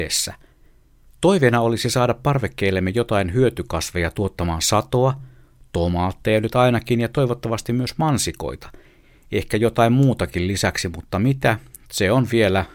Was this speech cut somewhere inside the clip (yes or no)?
no